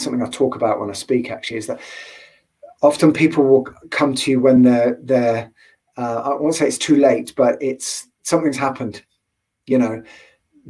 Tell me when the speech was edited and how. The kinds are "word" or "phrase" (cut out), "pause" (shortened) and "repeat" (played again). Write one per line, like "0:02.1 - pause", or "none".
none